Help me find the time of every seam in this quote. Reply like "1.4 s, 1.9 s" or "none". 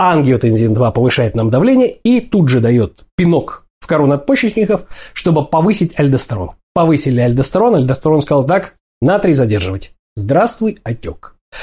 3.7 s